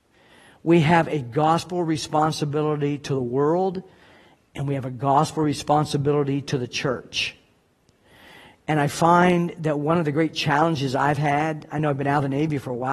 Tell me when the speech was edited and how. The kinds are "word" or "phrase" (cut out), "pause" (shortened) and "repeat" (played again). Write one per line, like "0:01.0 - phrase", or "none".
none